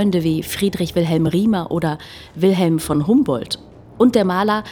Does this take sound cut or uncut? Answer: uncut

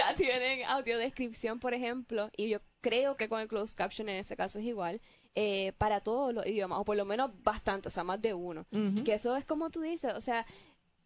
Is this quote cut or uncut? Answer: uncut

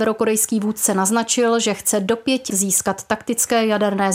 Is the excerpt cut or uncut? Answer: cut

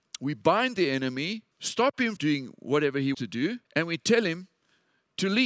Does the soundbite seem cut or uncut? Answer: cut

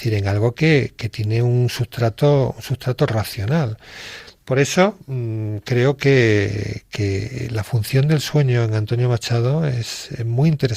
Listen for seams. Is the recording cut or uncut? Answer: uncut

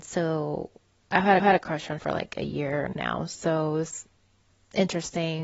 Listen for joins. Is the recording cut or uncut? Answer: cut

